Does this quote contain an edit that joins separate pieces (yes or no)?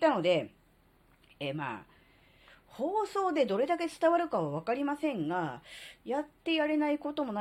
no